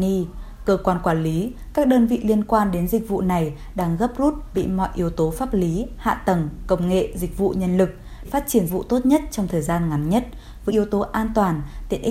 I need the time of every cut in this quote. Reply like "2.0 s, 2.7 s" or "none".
4.5 s, 8.2 s, 8.7 s, 10.7 s